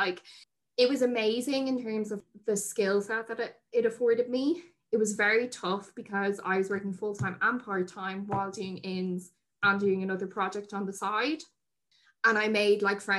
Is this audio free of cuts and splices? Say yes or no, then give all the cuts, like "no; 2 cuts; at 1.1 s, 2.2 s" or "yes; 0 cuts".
yes; 0 cuts